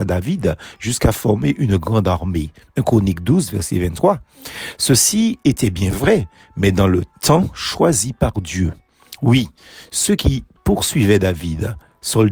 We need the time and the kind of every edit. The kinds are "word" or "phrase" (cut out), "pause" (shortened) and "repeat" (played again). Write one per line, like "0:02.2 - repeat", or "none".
none